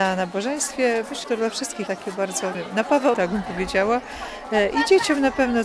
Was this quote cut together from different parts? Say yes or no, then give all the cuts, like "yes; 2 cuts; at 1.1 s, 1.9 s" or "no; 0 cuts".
yes; 4 cuts; at 1.2 s, 1.9 s, 2.5 s, 3.1 s